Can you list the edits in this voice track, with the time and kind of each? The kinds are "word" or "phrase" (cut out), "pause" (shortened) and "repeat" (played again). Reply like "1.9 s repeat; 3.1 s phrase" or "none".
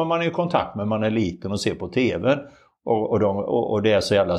none